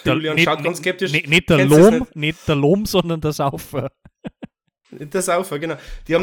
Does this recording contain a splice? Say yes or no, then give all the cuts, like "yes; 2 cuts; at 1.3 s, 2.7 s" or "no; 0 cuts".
no; 0 cuts